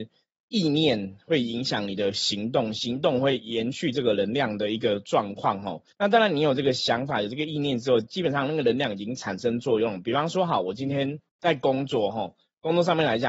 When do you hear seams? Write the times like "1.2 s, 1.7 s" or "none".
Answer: 5.9 s, 11.3 s